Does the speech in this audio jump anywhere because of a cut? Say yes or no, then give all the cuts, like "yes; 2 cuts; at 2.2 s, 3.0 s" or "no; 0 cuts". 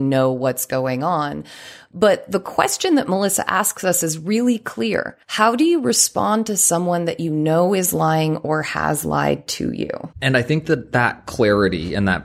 yes; 2 cuts; at 5.2 s, 10.1 s